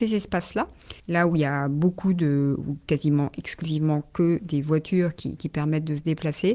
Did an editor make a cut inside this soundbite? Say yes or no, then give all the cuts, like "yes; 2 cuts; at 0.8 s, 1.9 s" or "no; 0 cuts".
yes; 1 cut; at 1.0 s